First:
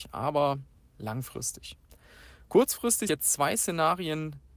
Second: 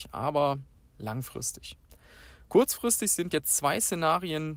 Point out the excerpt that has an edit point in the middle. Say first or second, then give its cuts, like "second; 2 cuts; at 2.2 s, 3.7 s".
first; 1 cut; at 3.1 s